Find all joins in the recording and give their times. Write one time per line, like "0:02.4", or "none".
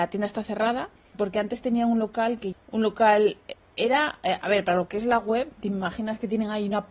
none

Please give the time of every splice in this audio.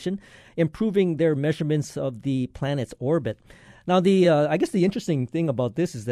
none

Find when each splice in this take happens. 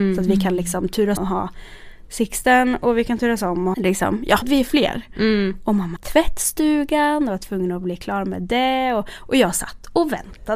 0:01.2
0:03.7
0:04.4
0:06.0

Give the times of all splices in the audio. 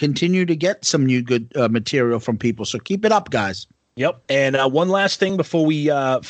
none

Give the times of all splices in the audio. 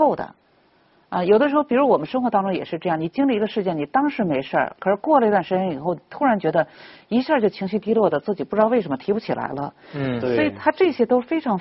none

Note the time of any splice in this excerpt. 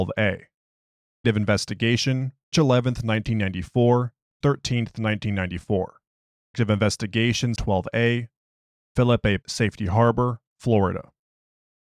0:01.2
0:02.5
0:04.4
0:06.5
0:07.6
0:09.4

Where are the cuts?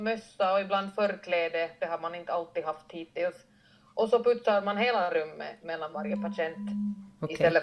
none

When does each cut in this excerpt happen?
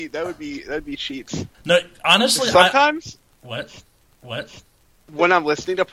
0:01.5
0:04.1

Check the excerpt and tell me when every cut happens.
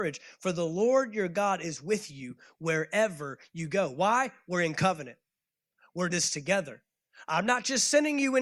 0:06.1

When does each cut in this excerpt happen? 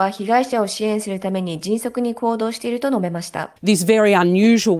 0:03.6

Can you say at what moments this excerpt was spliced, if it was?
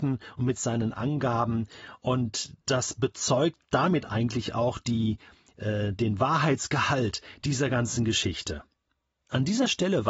0:03.6

